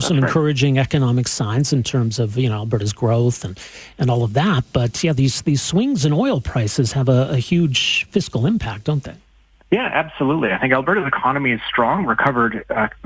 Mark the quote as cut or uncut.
uncut